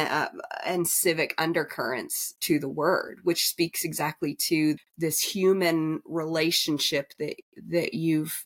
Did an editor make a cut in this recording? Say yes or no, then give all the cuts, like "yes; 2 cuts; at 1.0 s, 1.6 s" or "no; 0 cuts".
yes; 1 cut; at 4.8 s